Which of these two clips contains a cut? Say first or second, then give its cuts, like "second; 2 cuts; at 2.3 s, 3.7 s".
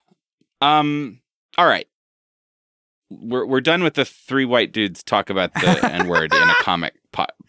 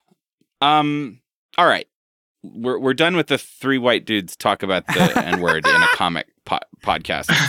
second; 1 cut; at 2.0 s